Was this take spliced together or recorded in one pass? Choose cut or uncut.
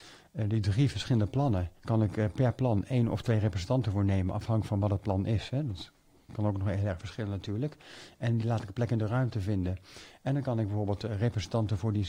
cut